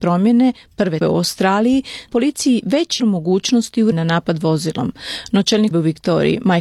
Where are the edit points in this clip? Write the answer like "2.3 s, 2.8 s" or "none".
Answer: 1.0 s, 2.1 s, 3.0 s, 3.9 s, 5.7 s

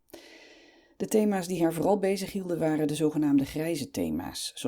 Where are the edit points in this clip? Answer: none

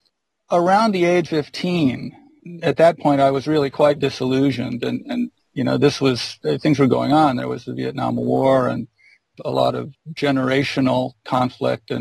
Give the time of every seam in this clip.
1.3 s, 5.4 s

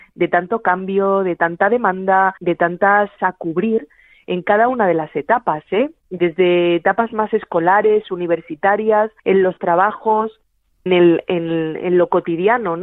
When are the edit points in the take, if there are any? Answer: 2.4 s, 3.2 s, 9.2 s, 10.9 s

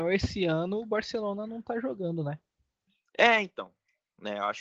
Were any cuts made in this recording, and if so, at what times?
none

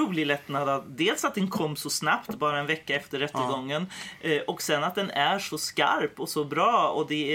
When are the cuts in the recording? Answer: none

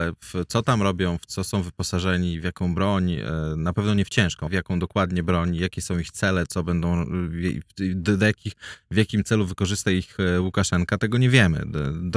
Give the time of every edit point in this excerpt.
4.5 s

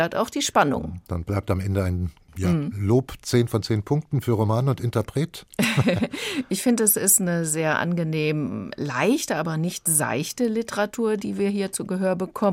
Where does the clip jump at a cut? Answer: none

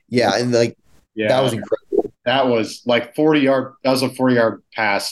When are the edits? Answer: none

